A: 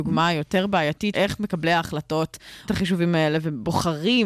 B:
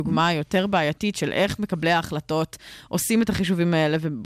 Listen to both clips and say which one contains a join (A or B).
A